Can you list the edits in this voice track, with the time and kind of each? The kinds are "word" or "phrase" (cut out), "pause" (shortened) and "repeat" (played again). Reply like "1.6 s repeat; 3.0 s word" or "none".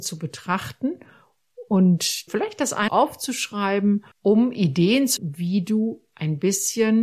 2.3 s word; 2.9 s phrase; 4.1 s pause; 5.2 s word